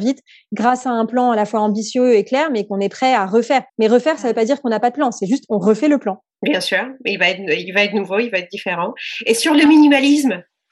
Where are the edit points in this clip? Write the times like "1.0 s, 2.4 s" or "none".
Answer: 3.7 s, 6.3 s